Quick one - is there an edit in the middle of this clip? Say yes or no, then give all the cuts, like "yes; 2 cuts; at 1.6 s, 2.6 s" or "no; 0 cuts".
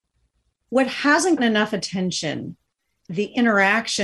yes; 2 cuts; at 1.4 s, 3.1 s